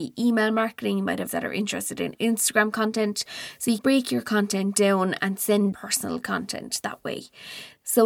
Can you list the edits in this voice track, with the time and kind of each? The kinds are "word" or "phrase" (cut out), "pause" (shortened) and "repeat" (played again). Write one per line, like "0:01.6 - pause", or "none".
0:01.3 - phrase
0:02.1 - word
0:03.8 - word
0:05.7 - word